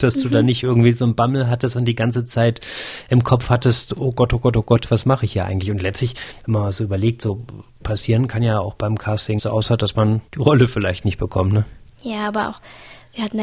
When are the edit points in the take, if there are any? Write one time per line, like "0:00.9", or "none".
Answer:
0:09.4
0:10.3